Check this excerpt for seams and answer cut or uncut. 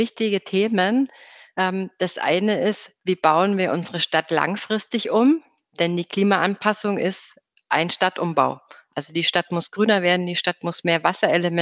uncut